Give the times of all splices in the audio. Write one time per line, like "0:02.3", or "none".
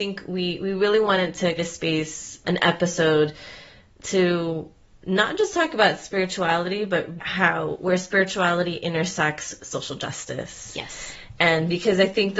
0:01.6
0:02.4
0:07.2
0:09.6